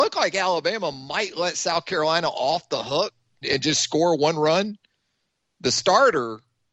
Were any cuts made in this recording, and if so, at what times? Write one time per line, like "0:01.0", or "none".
0:03.4